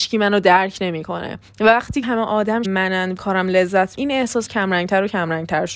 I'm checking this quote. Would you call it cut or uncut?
cut